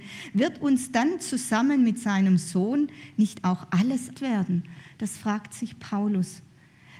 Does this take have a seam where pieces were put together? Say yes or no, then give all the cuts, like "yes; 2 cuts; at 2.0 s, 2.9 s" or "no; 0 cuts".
yes; 1 cut; at 4.1 s